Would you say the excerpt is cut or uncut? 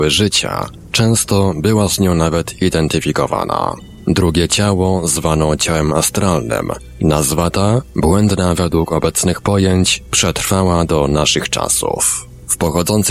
uncut